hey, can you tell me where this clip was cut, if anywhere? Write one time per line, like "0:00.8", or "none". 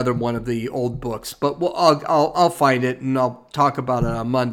none